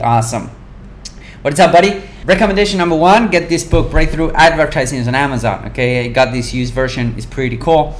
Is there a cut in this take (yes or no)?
yes